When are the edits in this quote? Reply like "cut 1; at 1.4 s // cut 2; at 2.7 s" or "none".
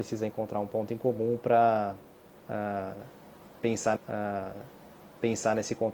cut 1; at 4.0 s